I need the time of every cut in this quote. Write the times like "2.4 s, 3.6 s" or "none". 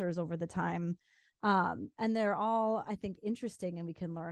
none